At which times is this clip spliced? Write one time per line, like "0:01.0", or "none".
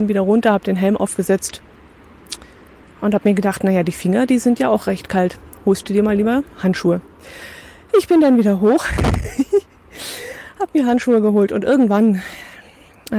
none

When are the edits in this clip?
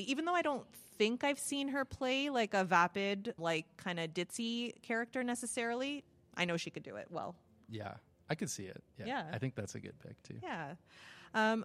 0:03.4

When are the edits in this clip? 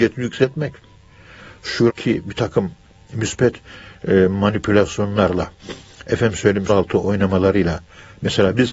0:01.9
0:06.7

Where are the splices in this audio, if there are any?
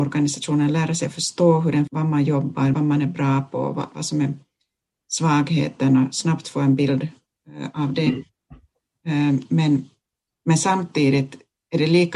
0:01.9
0:02.7

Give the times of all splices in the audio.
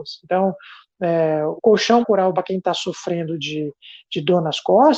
0:01.6
0:02.0
0:02.3

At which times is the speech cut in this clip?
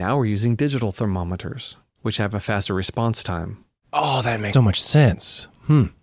0:04.5

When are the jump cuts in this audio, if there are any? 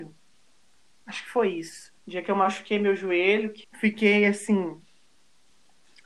0:02.0
0:03.6

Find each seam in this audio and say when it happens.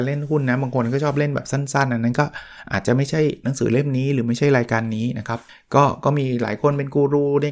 0:05.5

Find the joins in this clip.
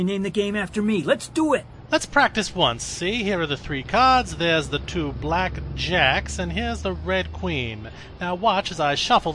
none

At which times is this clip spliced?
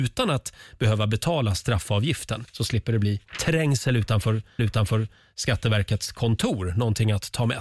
0:02.5
0:04.6

